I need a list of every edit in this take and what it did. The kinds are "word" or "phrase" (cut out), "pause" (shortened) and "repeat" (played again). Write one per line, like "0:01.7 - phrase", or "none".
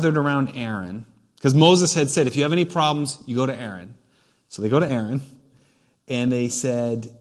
none